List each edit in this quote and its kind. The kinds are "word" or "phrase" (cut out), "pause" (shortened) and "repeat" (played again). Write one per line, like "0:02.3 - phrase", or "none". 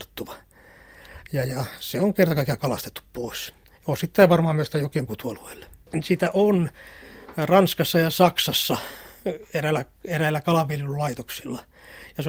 0:03.6 - pause
0:05.1 - phrase